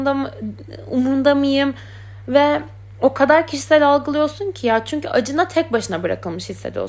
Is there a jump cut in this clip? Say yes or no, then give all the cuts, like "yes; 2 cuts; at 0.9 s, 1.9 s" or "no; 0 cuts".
no; 0 cuts